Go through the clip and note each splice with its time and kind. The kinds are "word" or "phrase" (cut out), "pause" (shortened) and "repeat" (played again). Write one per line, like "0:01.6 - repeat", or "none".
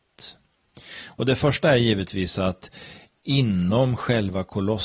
none